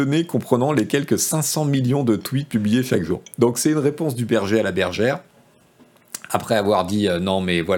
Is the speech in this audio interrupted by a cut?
no; 0 cuts

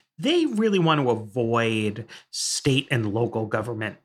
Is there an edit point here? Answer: no; 0 cuts

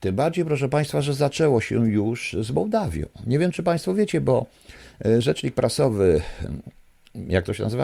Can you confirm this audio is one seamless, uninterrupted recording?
yes; 0 cuts

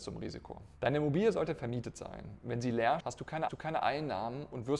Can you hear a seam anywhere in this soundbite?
yes; 2 cuts; at 3.0 s, 3.5 s

